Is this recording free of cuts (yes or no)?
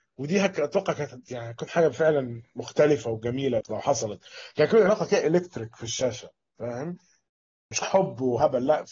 no